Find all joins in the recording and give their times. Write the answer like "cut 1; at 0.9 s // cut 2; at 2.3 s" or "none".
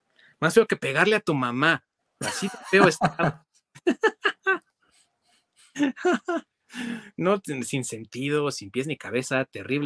none

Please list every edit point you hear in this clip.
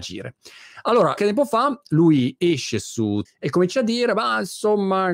cut 1; at 1.2 s // cut 2; at 3.2 s

